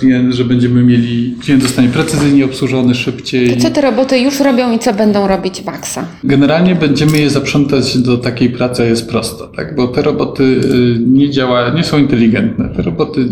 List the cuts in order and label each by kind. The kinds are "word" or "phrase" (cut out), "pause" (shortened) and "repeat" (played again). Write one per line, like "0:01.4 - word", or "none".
0:08.8 - word